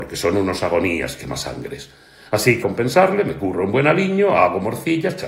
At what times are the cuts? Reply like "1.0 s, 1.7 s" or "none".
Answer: 2.6 s